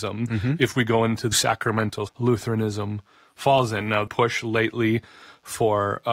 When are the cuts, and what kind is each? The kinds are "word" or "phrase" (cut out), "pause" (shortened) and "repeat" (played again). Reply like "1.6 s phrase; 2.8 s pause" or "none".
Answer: 1.3 s word; 2.1 s phrase; 4.1 s phrase